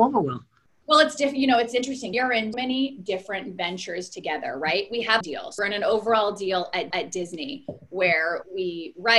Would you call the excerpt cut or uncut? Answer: cut